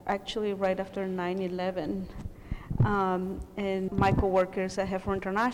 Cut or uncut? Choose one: cut